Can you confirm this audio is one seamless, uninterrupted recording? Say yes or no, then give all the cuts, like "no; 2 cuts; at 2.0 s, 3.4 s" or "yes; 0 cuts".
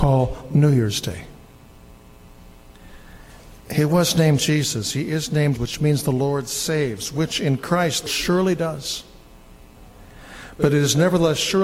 no; 3 cuts; at 3.6 s, 5.6 s, 8.1 s